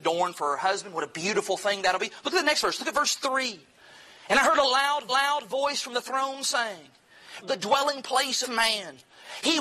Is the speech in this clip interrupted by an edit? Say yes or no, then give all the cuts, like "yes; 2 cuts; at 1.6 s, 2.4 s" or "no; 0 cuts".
yes; 3 cuts; at 5.1 s, 7.4 s, 8.4 s